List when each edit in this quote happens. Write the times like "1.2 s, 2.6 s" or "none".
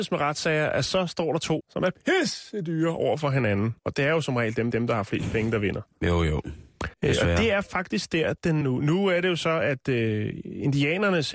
1.6 s, 3.8 s, 4.7 s, 6.9 s, 8.6 s